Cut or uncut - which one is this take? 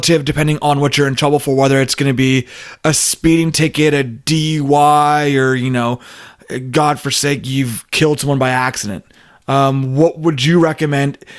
uncut